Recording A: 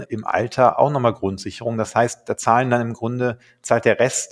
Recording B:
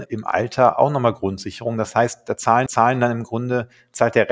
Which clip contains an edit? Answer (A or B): B